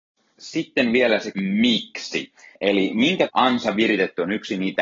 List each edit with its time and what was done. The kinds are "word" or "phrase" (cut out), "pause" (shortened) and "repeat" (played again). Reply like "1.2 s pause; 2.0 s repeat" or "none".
1.3 s word; 2.5 s pause; 3.3 s word

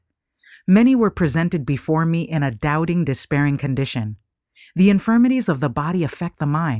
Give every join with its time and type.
none

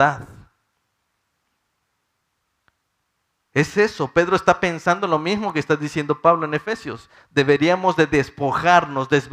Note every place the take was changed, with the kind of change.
none

